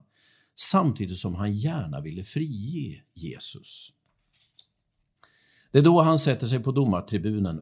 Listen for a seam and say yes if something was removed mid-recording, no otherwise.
no